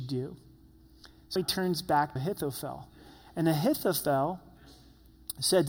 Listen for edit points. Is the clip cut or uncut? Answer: cut